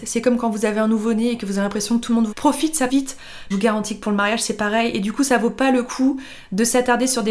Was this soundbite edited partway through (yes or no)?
yes